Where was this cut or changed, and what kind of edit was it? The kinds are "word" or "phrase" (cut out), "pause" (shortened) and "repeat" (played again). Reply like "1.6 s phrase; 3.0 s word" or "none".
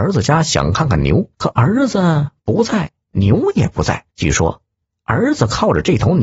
1.3 s pause; 4.1 s pause